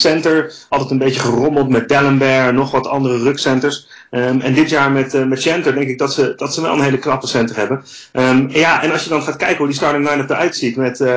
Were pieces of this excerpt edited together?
no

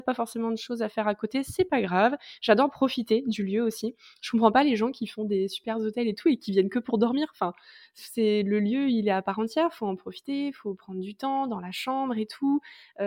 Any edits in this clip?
no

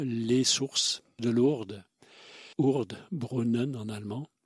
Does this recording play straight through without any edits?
no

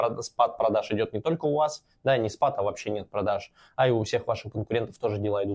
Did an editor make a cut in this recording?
no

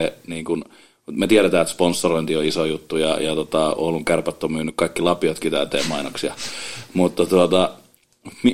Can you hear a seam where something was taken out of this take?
no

